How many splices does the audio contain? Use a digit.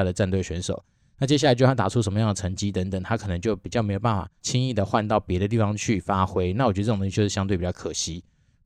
1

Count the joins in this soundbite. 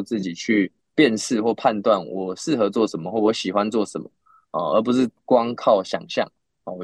0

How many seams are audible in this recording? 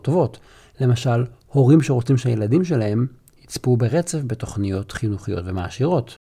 0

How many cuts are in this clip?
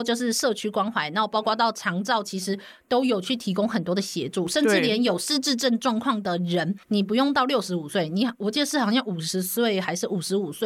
1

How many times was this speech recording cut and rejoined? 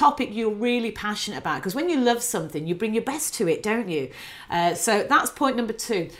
0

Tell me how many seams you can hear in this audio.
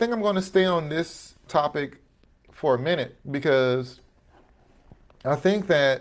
2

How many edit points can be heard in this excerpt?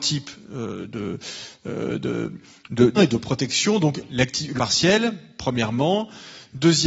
2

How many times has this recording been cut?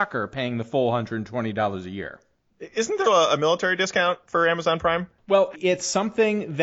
2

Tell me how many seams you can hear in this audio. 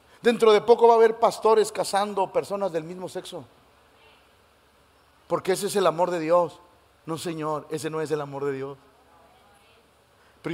0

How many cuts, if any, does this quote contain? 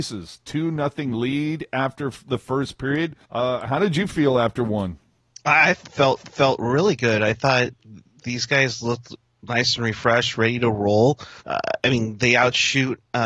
3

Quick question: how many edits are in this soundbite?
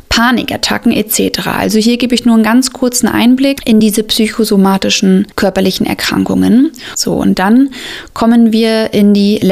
0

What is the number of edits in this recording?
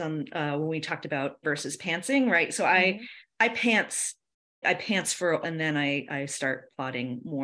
3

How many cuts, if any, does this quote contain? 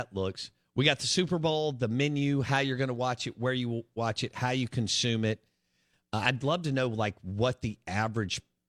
0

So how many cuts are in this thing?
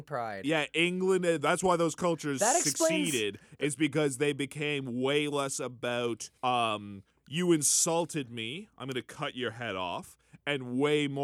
1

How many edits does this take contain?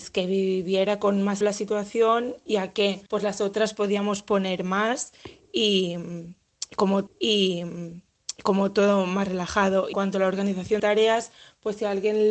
5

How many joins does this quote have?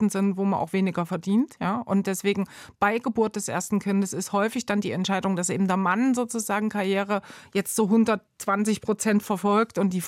0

